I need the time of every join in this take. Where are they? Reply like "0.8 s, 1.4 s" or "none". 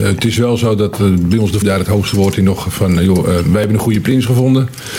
1.6 s